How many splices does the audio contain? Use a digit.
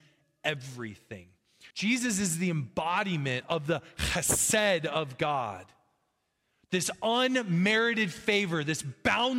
1